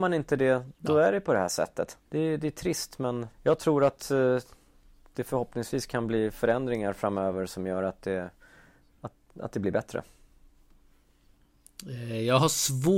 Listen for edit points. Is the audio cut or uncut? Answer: cut